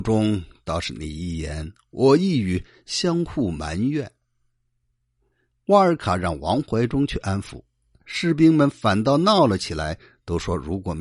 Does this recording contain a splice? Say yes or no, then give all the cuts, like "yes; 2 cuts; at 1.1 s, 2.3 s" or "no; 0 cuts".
no; 0 cuts